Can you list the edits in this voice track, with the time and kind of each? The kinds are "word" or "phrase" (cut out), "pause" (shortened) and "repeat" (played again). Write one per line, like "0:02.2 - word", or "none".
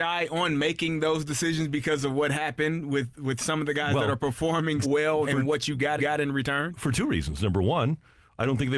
0:04.8 - word
0:05.2 - word
0:06.0 - repeat